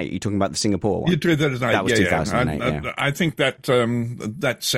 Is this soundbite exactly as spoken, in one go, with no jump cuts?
yes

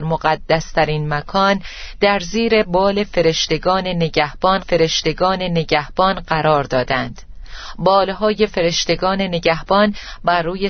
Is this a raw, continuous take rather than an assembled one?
no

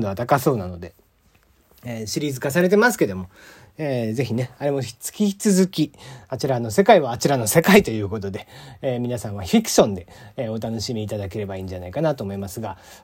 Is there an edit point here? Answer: no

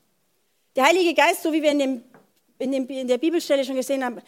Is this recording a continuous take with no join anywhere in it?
yes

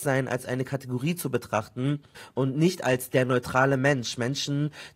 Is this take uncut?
yes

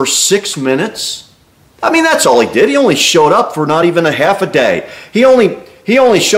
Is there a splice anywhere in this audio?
no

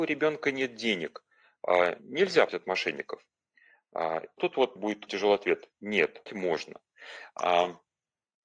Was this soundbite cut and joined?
yes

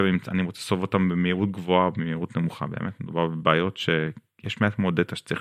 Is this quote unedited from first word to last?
yes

